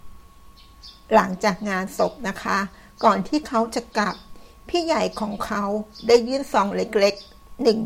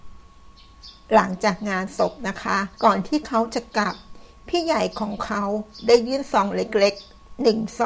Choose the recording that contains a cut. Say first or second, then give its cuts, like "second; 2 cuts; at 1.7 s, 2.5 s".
second; 1 cut; at 2.7 s